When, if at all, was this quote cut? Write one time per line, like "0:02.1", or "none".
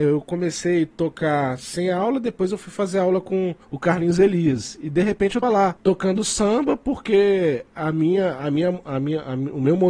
0:03.6
0:05.4
0:05.8